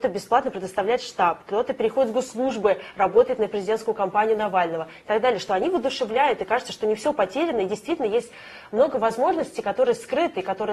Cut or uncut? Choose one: uncut